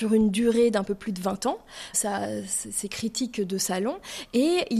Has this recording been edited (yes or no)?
yes